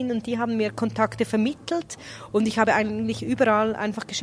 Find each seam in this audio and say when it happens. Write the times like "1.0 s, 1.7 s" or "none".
none